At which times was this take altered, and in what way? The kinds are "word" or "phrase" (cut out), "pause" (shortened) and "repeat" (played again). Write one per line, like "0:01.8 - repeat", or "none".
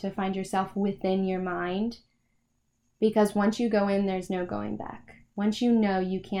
none